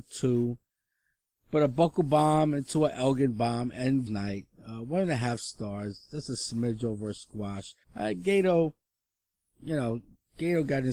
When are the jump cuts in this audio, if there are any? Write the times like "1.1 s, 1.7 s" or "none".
4.1 s, 7.8 s